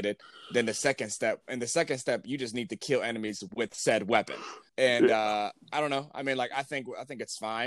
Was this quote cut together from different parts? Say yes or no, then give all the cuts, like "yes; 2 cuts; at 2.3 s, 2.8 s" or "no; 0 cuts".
yes; 1 cut; at 4.7 s